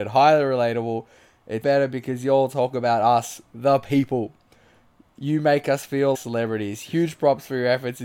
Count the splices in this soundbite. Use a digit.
2